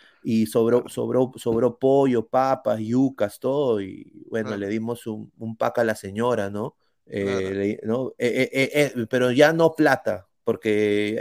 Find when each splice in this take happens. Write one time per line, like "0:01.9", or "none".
0:06.9